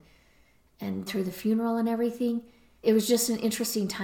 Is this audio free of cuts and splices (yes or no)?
no